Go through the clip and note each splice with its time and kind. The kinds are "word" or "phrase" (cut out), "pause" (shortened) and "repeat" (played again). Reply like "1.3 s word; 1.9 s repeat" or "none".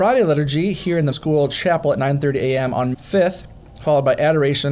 1.1 s word; 2.9 s word